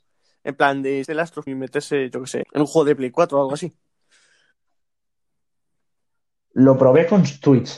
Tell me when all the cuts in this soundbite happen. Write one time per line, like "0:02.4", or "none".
0:01.0
0:01.5
0:02.4